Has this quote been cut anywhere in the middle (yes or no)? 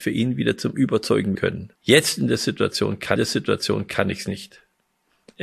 yes